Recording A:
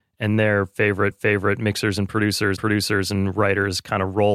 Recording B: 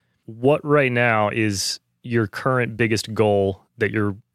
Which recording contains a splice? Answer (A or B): A